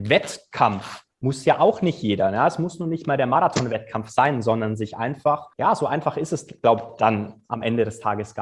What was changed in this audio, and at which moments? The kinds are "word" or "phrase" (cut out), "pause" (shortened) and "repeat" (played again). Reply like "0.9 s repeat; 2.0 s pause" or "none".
1.1 s pause; 5.5 s pause